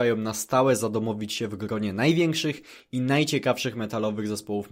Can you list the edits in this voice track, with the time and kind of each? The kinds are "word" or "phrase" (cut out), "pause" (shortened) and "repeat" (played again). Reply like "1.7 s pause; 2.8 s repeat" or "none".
none